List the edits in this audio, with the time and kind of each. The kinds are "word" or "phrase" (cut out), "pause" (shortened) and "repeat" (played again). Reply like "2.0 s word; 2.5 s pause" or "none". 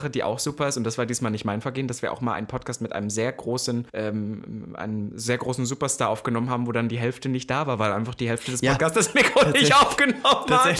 3.9 s pause